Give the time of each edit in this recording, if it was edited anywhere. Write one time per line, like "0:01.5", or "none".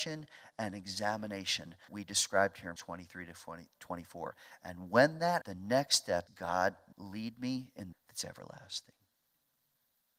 0:01.9
0:02.8
0:05.4
0:06.3
0:06.9
0:07.9